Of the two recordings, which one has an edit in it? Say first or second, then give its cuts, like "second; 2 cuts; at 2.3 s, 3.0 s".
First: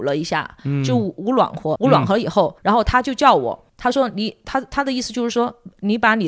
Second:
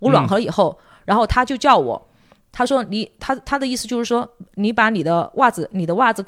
first; 3 cuts; at 1.8 s, 2.6 s, 3.7 s